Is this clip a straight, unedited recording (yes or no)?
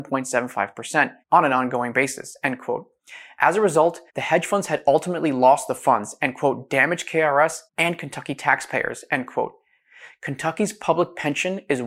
no